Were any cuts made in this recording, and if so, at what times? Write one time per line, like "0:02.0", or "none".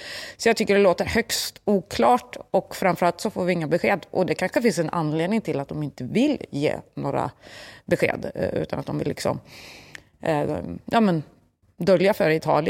none